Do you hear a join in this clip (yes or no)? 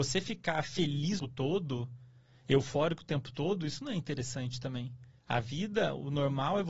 yes